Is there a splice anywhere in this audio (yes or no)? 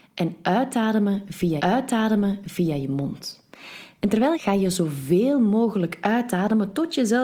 yes